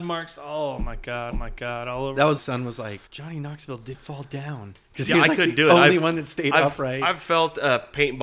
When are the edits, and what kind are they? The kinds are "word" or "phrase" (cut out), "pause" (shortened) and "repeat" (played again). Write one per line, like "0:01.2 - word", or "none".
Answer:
0:01.3 - repeat
0:02.4 - phrase
0:03.1 - pause
0:03.9 - word
0:04.8 - pause